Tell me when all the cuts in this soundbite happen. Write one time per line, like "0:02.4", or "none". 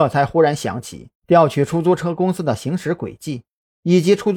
0:01.1